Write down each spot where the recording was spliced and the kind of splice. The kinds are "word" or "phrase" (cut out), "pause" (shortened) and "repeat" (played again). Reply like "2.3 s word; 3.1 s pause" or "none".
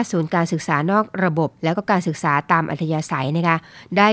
1.6 s pause